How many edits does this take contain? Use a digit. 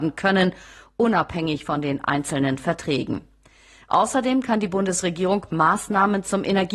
0